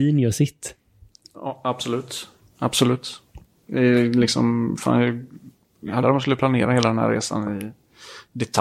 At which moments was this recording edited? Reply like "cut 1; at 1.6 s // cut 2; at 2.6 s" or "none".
cut 1; at 6.0 s